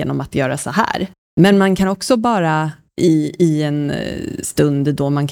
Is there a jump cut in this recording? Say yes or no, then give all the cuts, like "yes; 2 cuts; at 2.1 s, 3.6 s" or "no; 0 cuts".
no; 0 cuts